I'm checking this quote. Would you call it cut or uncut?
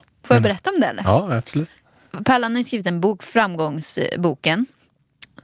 uncut